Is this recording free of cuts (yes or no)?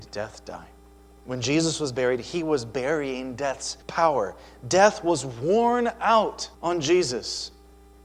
no